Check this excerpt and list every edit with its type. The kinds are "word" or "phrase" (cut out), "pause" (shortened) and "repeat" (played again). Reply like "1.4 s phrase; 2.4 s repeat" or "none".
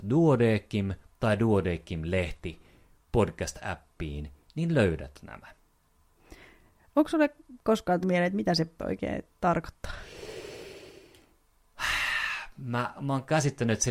7.6 s word; 8.0 s word; 8.8 s word; 13.0 s word